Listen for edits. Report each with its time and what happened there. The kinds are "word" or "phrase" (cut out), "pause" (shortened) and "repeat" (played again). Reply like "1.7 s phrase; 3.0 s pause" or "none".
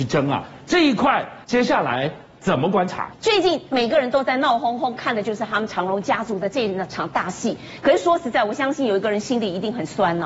1.4 s pause

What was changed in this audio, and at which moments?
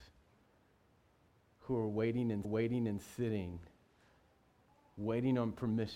2.4 s repeat

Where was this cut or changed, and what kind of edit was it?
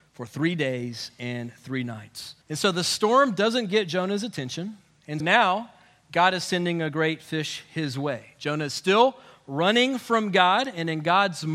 2.4 s pause; 5.2 s word

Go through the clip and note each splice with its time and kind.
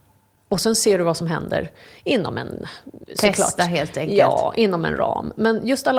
none

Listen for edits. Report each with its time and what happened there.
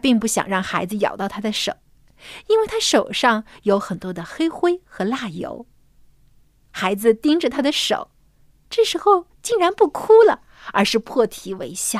none

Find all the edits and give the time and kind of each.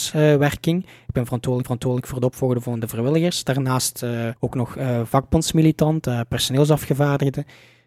1.6 s repeat; 4.4 s pause

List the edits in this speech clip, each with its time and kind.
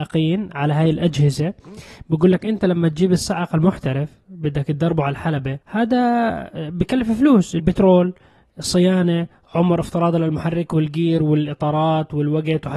5.6 s pause; 7.6 s word

